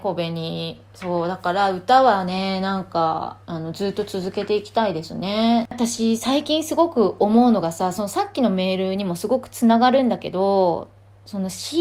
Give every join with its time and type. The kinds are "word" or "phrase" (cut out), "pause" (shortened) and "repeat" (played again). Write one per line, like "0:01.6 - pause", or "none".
0:03.4 - pause

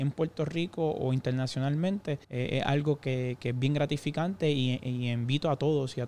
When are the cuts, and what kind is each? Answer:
0:02.2 - pause

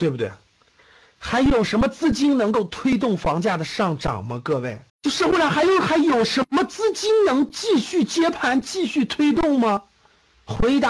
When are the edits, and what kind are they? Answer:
0:04.9 - pause

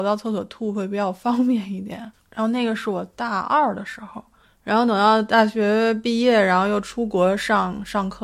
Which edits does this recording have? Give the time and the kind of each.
0:02.2 - pause
0:04.4 - pause

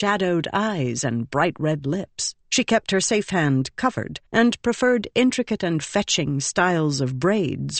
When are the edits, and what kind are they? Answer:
0:02.4 - pause
0:04.3 - pause

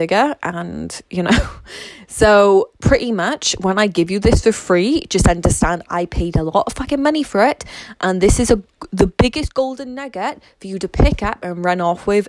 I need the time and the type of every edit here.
none

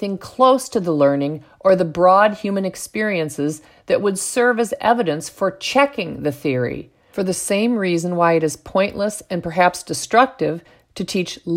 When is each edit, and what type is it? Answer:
none

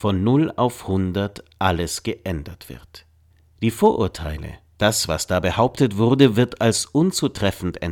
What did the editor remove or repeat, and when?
0:03.3 - pause

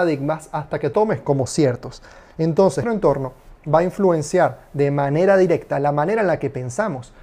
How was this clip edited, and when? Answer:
0:00.9 - word
0:02.8 - word

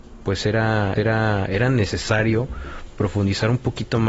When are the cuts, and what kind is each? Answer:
0:01.0 - repeat

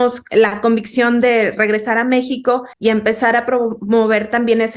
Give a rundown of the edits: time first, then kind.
0:02.7 - pause

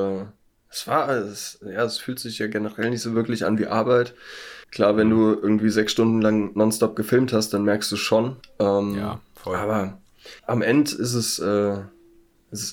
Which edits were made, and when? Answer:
0:04.6 - pause
0:08.4 - pause
0:10.4 - pause

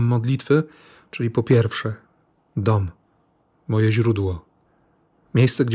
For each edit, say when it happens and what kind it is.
none

